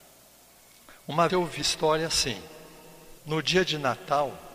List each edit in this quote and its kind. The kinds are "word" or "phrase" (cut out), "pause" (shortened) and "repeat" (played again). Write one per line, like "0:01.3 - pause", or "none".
0:01.3 - word
0:01.6 - word
0:03.2 - pause